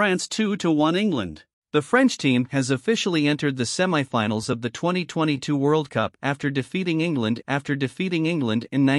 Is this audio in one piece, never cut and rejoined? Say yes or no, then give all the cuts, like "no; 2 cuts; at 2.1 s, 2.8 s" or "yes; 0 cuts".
no; 2 cuts; at 1.5 s, 7.4 s